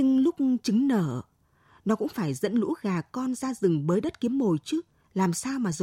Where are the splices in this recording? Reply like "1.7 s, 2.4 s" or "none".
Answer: none